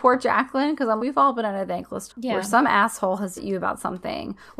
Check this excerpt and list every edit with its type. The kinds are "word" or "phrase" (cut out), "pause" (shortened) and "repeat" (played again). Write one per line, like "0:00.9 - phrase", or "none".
0:01.0 - word
0:02.1 - word
0:03.4 - word